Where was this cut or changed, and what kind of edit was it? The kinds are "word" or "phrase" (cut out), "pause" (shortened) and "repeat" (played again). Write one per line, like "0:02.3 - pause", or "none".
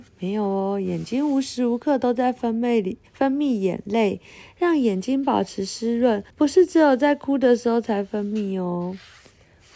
0:03.1 - pause
0:06.3 - pause